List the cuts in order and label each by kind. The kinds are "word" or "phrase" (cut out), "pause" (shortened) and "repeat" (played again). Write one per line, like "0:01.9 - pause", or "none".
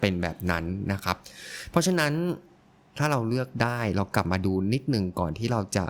none